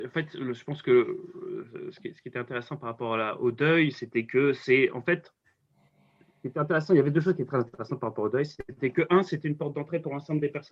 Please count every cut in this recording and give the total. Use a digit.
0